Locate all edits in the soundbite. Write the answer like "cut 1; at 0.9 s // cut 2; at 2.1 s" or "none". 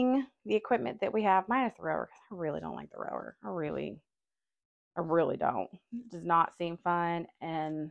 none